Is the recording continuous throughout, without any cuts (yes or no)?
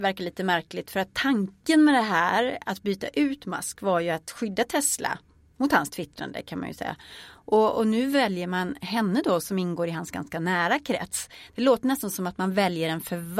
yes